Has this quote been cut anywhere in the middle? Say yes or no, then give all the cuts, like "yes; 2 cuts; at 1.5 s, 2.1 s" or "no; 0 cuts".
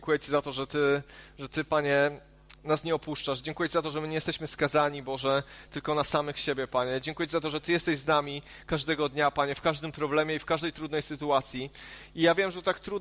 no; 0 cuts